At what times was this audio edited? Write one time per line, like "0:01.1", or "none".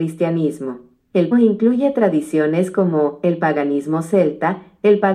0:01.3